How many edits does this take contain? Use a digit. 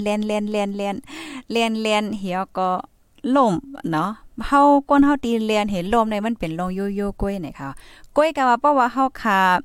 0